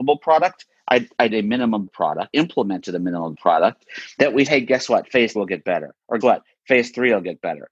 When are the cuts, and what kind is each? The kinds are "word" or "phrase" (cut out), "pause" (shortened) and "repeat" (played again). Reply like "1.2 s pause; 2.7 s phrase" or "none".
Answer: 1.3 s word; 1.9 s word; 2.3 s word; 3.3 s word; 4.5 s word; 5.4 s word; 6.2 s word